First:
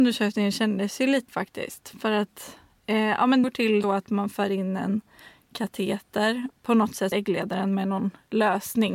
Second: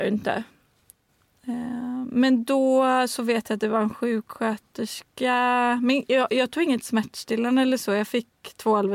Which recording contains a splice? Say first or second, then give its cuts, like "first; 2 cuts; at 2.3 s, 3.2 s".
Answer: first; 5 cuts; at 1.3 s, 3.4 s, 3.8 s, 6.5 s, 7.1 s